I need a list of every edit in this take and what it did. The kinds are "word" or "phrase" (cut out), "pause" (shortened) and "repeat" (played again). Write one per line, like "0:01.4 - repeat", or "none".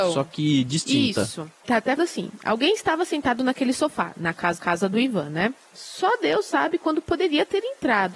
0:01.5 - pause
0:02.0 - word
0:04.6 - repeat

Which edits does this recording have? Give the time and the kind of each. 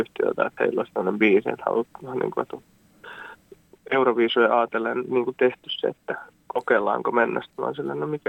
none

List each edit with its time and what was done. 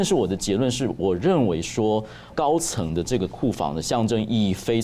0:02.3 - word

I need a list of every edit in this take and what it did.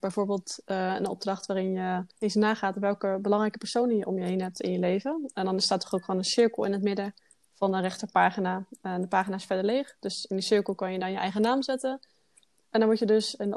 0:02.1 - pause

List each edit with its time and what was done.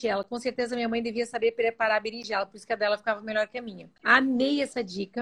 0:04.0 - pause

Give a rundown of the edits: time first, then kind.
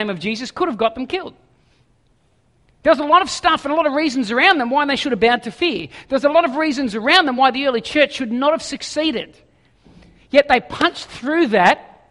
none

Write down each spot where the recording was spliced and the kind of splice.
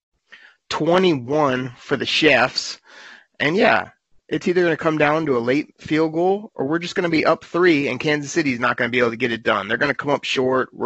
none

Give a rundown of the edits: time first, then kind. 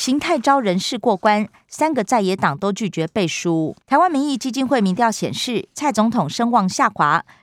0:03.8 - pause

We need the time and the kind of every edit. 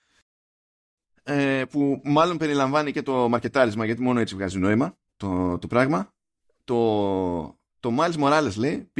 0:05.1 - pause
0:06.4 - pause

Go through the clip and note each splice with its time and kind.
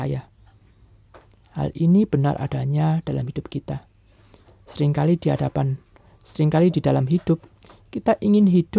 none

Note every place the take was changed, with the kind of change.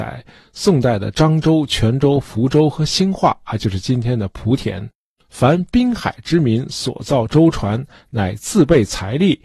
none

